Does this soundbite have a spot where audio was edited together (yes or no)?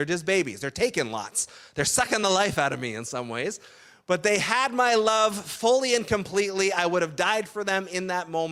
no